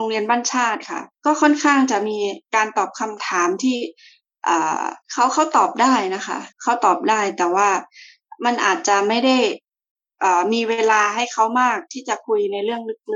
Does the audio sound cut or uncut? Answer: cut